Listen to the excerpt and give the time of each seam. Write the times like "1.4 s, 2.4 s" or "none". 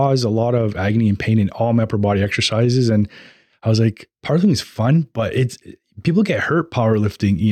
none